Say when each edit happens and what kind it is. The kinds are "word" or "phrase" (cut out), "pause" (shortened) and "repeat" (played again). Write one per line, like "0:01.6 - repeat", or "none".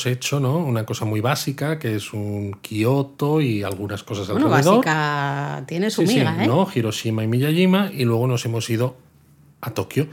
none